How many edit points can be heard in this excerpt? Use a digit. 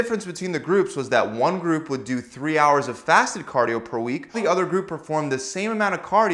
1